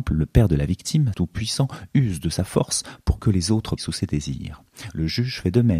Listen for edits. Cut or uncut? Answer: cut